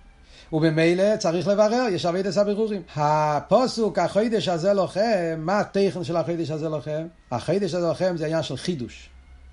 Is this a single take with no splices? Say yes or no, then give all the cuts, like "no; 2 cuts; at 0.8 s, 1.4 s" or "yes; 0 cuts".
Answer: no; 2 cuts; at 2.9 s, 7.2 s